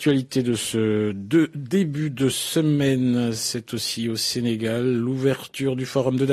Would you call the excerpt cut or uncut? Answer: uncut